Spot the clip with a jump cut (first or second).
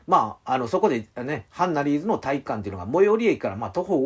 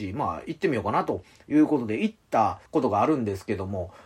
second